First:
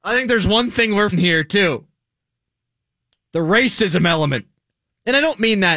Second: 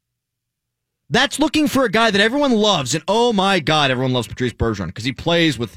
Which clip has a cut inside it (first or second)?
first